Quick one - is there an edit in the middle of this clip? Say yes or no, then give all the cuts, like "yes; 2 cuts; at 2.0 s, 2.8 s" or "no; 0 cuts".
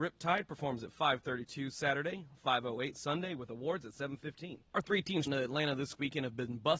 yes; 2 cuts; at 4.7 s, 5.3 s